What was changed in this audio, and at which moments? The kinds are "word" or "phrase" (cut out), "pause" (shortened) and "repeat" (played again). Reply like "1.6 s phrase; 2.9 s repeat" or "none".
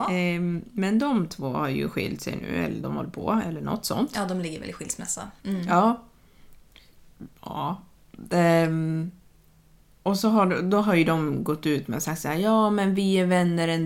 7.3 s pause